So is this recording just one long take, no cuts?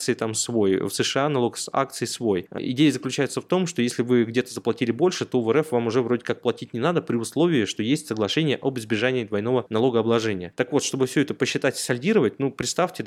yes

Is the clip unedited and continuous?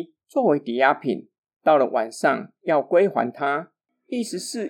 yes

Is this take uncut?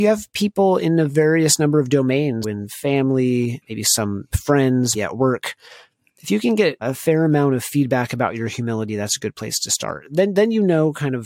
no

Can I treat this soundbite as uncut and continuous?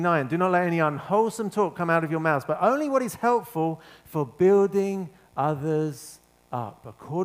yes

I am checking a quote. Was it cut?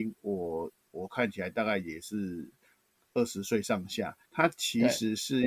yes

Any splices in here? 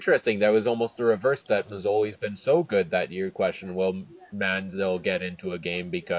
no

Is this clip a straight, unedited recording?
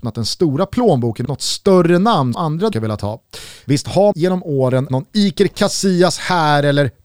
no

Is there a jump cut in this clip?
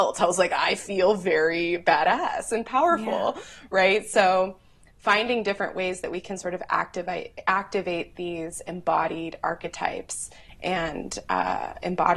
no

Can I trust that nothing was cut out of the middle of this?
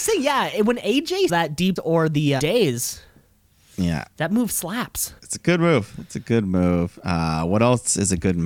no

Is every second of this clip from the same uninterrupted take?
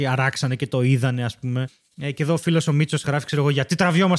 yes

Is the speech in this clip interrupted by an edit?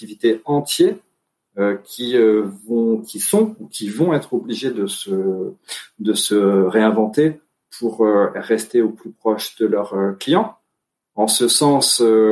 no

